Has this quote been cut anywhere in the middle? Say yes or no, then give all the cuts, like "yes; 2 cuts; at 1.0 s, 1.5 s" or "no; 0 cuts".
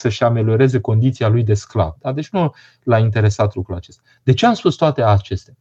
no; 0 cuts